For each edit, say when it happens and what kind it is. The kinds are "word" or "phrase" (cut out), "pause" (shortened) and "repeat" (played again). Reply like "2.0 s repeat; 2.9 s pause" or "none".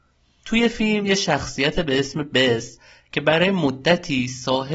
none